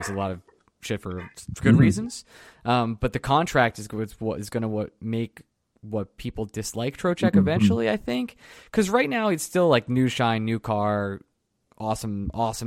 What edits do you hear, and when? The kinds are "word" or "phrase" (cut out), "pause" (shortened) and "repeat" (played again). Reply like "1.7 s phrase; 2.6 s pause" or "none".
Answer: none